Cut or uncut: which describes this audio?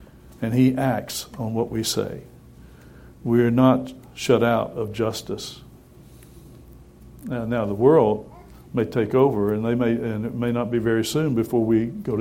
uncut